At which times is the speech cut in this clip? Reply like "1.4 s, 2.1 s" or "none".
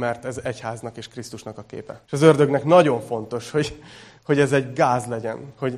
2.0 s